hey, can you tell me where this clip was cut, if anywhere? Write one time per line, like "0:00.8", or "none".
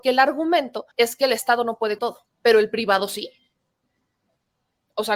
0:00.9
0:02.0
0:02.3